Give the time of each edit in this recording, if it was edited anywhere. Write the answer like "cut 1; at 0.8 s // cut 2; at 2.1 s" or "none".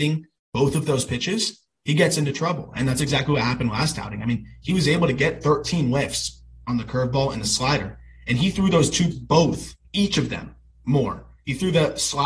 cut 1; at 9.1 s